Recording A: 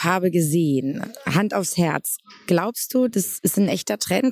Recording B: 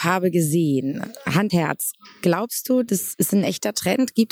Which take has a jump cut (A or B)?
B